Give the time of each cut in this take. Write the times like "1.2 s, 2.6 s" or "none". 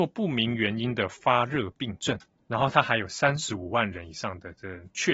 2.4 s